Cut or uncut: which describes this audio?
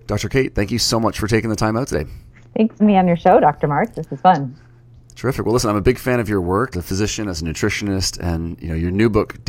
cut